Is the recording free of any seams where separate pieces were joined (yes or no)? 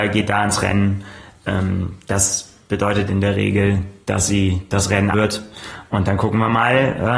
no